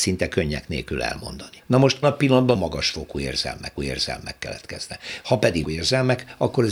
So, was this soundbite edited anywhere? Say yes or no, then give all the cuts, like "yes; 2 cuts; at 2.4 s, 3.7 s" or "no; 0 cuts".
yes; 5 cuts; at 1.6 s, 2.0 s, 2.5 s, 3.8 s, 5.6 s